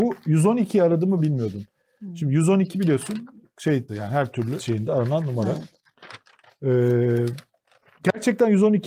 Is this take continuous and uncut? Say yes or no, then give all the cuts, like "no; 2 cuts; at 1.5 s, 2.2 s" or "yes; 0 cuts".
no; 4 cuts; at 1.2 s, 3.5 s, 3.9 s, 4.6 s